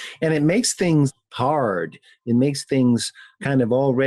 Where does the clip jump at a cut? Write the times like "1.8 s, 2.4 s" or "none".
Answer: none